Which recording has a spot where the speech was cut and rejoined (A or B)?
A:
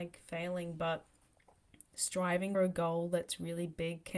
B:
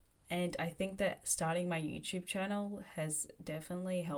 A